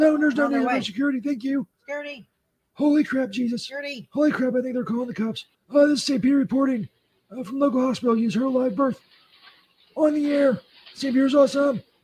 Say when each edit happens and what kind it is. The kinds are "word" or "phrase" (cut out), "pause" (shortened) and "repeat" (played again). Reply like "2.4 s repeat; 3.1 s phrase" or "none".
5.5 s pause